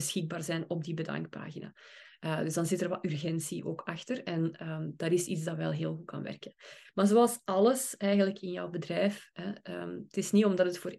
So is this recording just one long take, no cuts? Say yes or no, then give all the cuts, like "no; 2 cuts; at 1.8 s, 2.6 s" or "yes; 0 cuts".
yes; 0 cuts